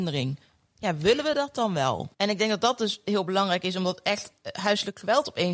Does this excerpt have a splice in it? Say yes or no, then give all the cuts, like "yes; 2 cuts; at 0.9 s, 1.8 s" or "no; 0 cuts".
yes; 1 cut; at 2.1 s